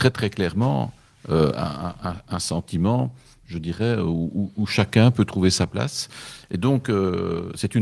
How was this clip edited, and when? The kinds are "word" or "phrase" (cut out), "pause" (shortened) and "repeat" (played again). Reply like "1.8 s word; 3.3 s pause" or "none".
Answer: none